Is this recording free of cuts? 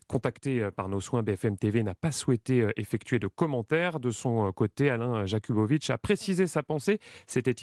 yes; 0 cuts

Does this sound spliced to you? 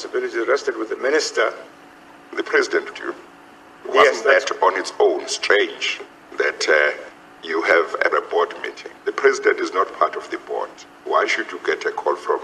yes; 2 cuts; at 2.9 s, 8.1 s

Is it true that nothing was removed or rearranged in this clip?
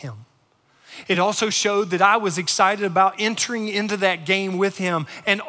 yes; 0 cuts

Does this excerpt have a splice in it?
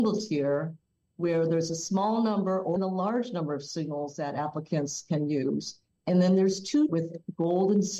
yes; 2 cuts; at 2.8 s, 6.9 s

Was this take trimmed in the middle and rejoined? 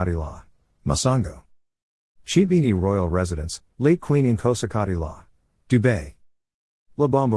no; 0 cuts

